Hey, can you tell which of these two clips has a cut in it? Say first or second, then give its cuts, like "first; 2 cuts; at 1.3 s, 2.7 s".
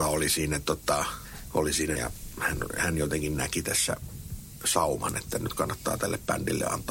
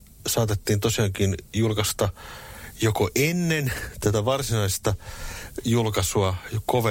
first; 1 cut; at 2.0 s